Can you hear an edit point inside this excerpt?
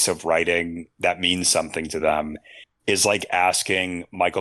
no; 0 cuts

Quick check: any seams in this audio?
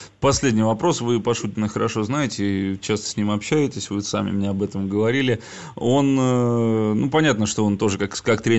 no; 0 cuts

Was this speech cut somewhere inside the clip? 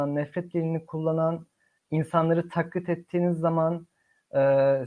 no; 0 cuts

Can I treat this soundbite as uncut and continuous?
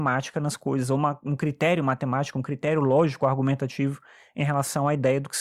yes; 0 cuts

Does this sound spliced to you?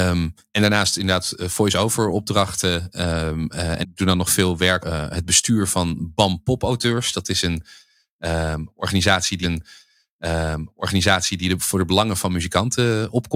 yes; 3 cuts; at 3.8 s, 4.8 s, 9.4 s

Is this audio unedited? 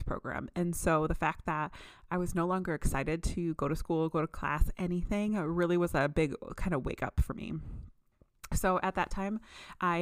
yes; 0 cuts

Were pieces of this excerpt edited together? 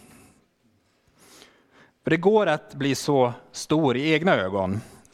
no; 0 cuts

